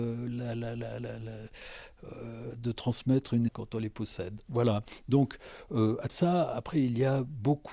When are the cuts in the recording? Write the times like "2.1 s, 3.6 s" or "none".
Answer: 3.5 s, 6.1 s